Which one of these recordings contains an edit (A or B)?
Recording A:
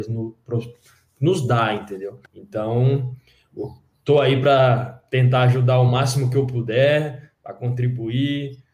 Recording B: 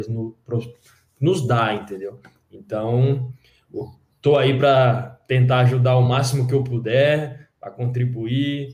A